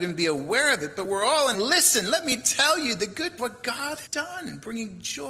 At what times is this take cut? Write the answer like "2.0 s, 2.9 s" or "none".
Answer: 1.5 s, 3.4 s, 4.1 s